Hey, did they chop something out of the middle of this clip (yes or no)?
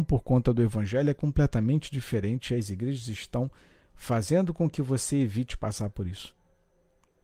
no